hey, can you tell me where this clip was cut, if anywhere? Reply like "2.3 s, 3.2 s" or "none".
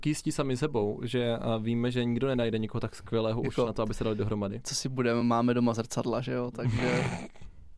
none